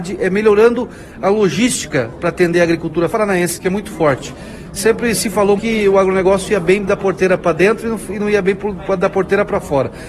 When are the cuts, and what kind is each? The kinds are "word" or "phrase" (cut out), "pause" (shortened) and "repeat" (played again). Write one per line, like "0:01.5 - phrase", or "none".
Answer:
0:03.1 - phrase
0:05.6 - word